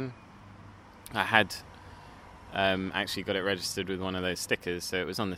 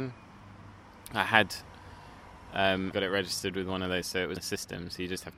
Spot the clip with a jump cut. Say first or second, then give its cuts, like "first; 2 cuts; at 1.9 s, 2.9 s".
second; 3 cuts; at 2.9 s, 4.0 s, 4.4 s